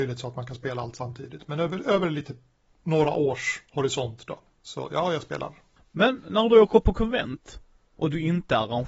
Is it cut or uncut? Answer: uncut